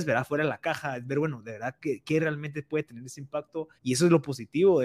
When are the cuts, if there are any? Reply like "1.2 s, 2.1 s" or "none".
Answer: 3.8 s